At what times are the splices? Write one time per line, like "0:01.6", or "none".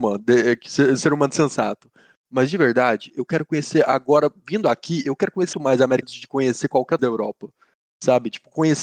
0:05.5
0:06.0
0:07.0